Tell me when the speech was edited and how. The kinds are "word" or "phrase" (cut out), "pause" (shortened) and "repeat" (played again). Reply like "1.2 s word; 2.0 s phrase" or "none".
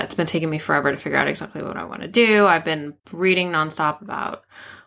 3.0 s pause